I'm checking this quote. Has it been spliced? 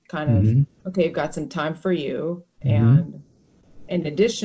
yes; 1 cut; at 2.5 s

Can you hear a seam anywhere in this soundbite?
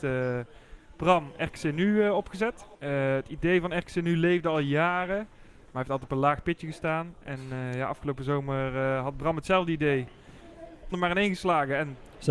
yes; 2 cuts; at 2.7 s, 10.9 s

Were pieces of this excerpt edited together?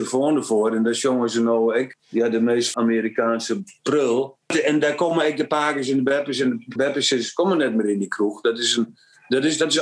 yes; 4 cuts; at 2.0 s, 2.7 s, 4.4 s, 6.8 s

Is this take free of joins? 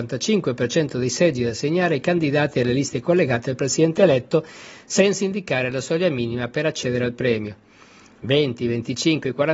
yes; 0 cuts

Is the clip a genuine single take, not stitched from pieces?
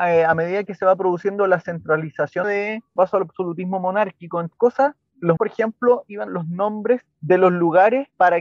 no; 5 cuts; at 2.4 s, 3.0 s, 4.5 s, 5.4 s, 6.3 s

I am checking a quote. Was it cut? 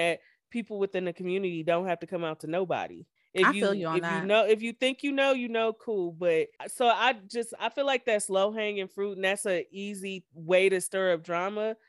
yes; 2 cuts; at 3.2 s, 6.6 s

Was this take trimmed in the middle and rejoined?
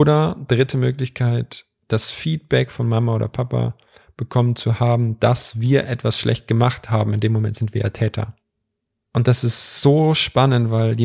no; 0 cuts

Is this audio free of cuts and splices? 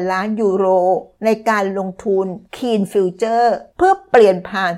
no; 3 cuts; at 1.1 s, 2.4 s, 3.7 s

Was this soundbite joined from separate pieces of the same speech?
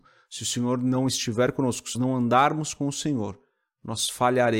yes; 1 cut; at 1.9 s

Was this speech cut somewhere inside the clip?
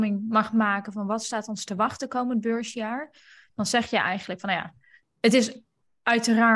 no; 0 cuts

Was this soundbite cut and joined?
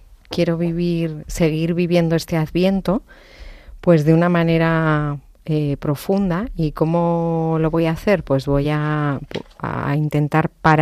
no; 0 cuts

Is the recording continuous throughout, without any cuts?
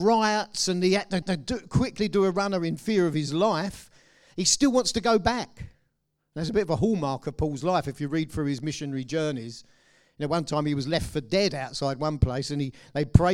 no; 1 cut; at 1.2 s

